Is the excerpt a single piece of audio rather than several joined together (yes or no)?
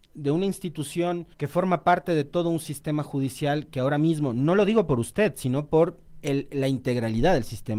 no